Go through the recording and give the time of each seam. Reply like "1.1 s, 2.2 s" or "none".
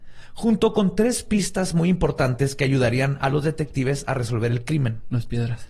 none